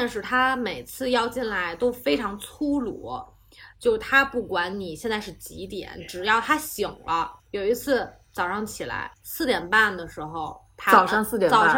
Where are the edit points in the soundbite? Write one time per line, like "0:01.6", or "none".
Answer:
0:07.4
0:09.1